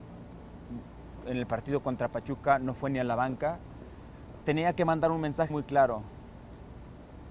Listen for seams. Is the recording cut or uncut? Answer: cut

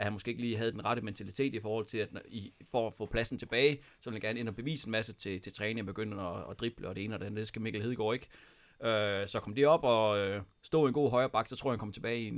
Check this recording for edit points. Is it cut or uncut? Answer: uncut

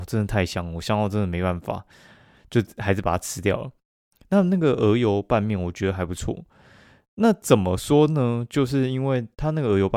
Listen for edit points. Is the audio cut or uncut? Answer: uncut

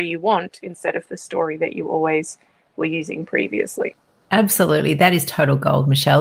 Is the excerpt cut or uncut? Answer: uncut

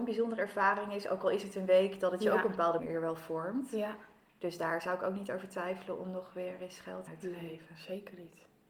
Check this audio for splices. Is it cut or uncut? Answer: cut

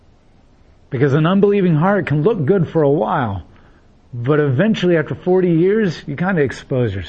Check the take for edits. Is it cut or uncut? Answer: uncut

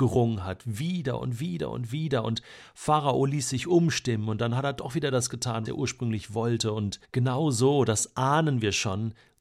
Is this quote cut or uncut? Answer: cut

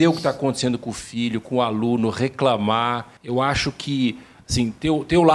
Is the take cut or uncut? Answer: cut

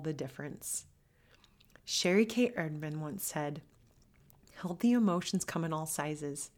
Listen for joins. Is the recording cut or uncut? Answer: uncut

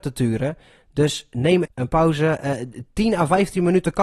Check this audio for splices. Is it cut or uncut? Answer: cut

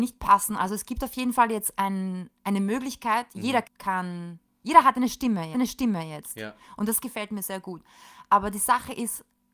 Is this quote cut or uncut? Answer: cut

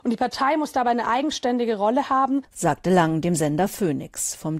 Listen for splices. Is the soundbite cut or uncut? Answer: uncut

